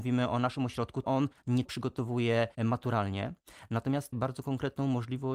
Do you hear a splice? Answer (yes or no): yes